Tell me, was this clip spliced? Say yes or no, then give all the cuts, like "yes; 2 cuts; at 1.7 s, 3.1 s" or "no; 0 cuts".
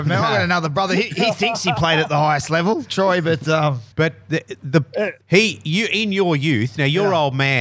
yes; 2 cuts; at 3.9 s, 5.2 s